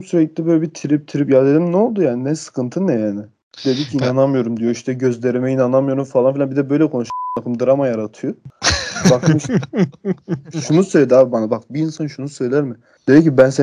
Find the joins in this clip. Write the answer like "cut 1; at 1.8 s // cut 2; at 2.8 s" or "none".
none